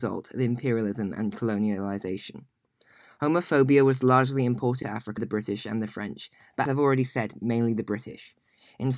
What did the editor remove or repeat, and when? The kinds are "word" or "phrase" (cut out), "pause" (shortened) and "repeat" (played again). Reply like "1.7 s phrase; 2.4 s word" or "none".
4.8 s word; 5.2 s word; 6.7 s word

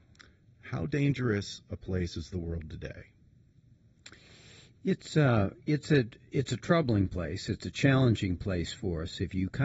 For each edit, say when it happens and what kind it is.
none

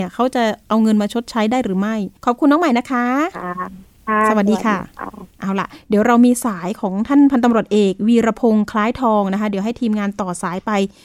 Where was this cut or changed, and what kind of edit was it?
2.2 s pause; 5.3 s pause

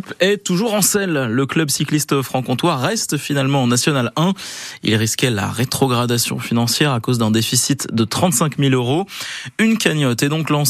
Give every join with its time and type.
none

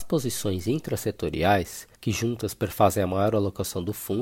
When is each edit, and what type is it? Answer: 1.9 s pause

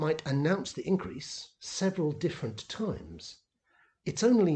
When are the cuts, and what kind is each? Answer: none

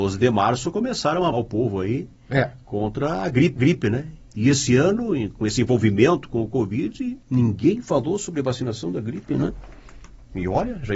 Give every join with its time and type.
1.3 s word; 3.6 s repeat; 7.2 s pause

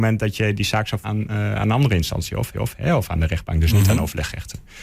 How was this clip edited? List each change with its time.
1.0 s word; 2.5 s repeat

